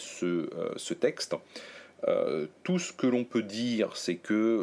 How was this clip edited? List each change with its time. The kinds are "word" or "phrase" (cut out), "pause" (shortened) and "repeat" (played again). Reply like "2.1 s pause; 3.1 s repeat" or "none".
none